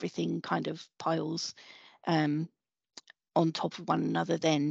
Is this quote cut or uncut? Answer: uncut